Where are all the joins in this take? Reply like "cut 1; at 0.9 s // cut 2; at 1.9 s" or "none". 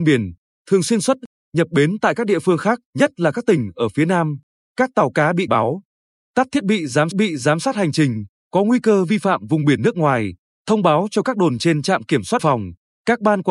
cut 1; at 2.9 s // cut 2; at 5.5 s // cut 3; at 7.1 s // cut 4; at 12.4 s